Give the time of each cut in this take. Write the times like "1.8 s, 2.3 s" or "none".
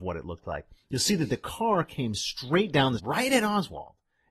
3.0 s